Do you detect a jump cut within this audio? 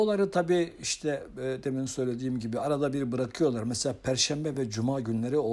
no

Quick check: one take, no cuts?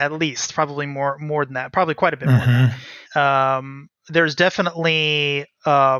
no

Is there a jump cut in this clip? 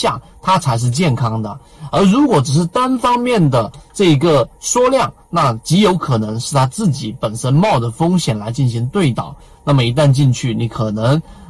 no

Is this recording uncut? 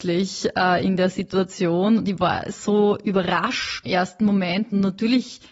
no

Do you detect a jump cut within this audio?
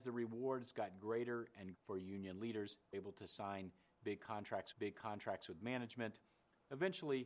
yes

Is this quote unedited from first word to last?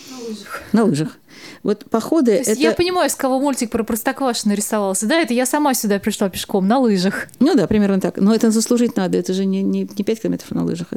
yes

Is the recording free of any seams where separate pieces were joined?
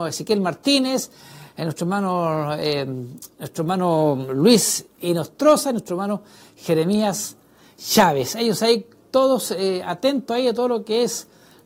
yes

